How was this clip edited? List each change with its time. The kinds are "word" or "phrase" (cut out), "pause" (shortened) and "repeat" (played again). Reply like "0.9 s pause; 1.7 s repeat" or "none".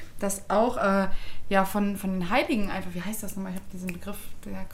none